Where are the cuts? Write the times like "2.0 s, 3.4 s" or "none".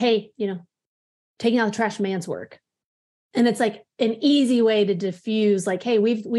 none